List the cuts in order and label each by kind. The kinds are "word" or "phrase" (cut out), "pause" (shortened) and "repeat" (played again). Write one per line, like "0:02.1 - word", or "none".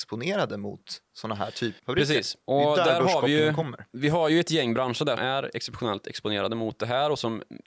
0:01.1 - pause
0:01.8 - word
0:02.4 - pause
0:05.2 - word